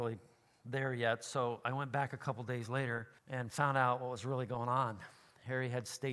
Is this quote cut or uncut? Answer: cut